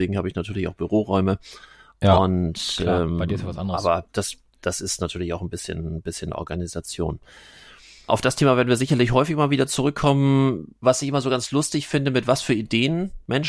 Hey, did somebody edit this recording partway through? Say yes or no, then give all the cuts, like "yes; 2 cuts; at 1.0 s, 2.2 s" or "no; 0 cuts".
no; 0 cuts